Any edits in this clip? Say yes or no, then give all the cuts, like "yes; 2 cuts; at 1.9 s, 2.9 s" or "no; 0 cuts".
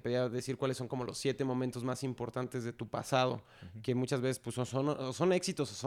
no; 0 cuts